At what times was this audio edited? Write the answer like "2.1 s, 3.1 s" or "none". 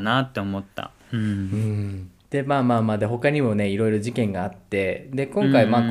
2.2 s